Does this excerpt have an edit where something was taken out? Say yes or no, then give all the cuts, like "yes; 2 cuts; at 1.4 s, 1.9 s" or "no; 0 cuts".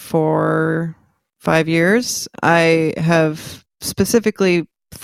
no; 0 cuts